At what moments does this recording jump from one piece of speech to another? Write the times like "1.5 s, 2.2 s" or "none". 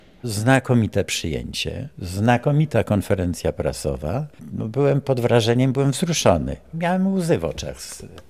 4.3 s